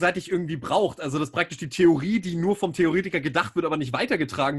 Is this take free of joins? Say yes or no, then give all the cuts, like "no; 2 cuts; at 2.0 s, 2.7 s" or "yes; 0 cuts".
yes; 0 cuts